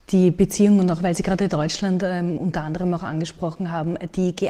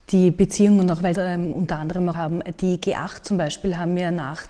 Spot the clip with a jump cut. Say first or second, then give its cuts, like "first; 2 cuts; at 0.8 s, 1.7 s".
second; 2 cuts; at 1.1 s, 2.1 s